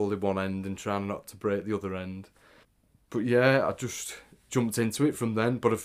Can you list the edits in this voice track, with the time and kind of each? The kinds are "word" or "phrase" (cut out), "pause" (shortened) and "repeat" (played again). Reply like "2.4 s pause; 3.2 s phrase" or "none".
none